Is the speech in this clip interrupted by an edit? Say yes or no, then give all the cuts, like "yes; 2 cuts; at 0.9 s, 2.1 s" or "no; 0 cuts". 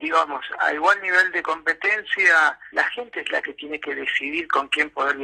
yes; 1 cut; at 2.7 s